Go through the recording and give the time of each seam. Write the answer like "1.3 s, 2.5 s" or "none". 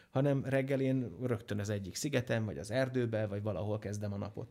none